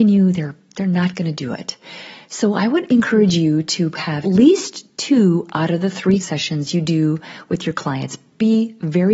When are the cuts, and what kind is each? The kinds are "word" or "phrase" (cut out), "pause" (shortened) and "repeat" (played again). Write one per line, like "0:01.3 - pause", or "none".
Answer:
0:04.2 - word
0:06.2 - word